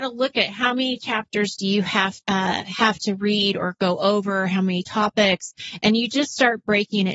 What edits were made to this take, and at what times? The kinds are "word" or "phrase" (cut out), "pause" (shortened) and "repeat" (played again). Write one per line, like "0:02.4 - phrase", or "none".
0:02.2 - pause